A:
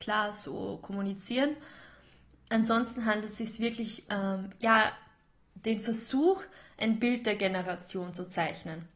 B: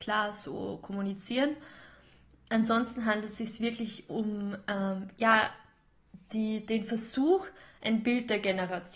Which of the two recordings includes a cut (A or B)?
A